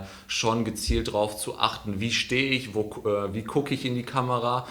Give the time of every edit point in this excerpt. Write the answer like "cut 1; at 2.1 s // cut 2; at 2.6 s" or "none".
none